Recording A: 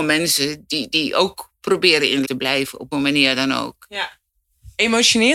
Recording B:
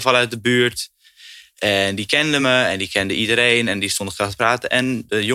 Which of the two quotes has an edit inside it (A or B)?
A